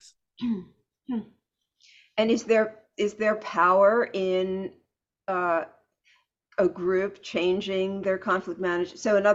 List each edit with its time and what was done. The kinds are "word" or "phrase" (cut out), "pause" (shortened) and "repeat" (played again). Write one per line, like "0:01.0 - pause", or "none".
none